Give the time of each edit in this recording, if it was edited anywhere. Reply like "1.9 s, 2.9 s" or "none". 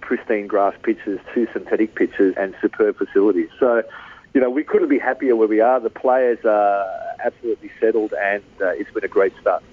2.3 s